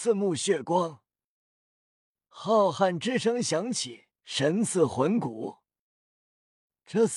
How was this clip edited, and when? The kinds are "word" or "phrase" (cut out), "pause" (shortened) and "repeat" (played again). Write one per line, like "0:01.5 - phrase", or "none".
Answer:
none